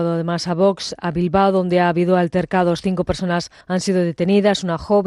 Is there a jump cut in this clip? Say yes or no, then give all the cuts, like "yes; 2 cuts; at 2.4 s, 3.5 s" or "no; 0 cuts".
yes; 1 cut; at 3.6 s